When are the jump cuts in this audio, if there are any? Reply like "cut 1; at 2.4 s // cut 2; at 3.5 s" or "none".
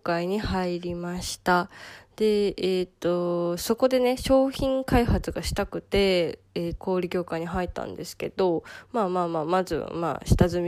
cut 1; at 6.8 s